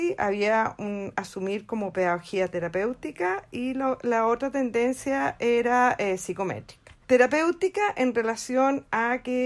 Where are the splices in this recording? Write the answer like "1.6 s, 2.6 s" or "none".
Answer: 7.0 s